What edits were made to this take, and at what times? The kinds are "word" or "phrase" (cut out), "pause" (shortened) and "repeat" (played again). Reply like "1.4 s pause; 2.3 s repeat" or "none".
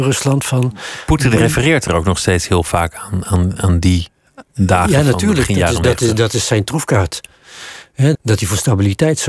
8.1 s word